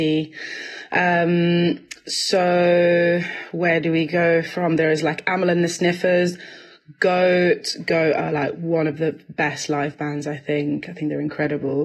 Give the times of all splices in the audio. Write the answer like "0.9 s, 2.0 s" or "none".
none